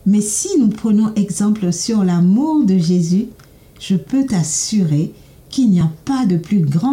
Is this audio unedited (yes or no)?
yes